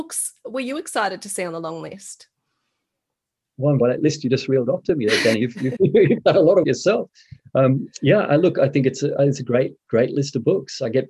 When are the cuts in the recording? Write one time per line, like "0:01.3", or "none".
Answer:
0:03.8
0:05.8
0:06.6